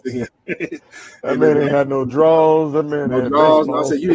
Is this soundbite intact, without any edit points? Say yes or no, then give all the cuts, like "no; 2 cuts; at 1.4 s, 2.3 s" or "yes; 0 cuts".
yes; 0 cuts